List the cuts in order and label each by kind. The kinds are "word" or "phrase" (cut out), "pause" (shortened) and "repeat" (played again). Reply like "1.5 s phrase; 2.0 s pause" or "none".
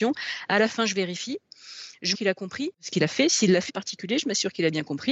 2.1 s word; 3.7 s word